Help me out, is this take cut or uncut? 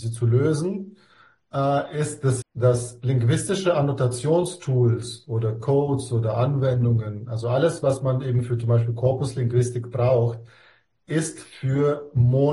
cut